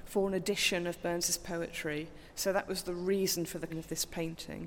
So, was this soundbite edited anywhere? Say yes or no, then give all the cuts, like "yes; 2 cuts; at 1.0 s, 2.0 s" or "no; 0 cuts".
yes; 1 cut; at 3.7 s